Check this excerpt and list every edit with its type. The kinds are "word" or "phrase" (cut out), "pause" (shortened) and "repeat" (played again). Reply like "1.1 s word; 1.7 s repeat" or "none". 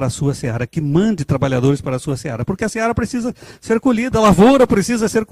none